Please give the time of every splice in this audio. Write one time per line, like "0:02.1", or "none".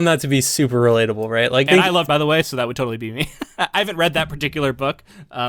0:01.7
0:02.1